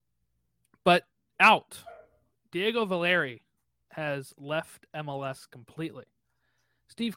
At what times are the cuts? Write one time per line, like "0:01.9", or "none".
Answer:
none